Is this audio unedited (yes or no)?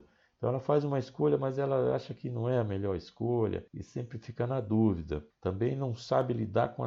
no